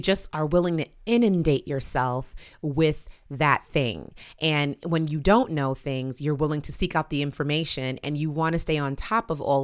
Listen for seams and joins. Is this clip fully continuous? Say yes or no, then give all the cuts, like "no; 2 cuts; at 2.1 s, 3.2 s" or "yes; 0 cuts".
yes; 0 cuts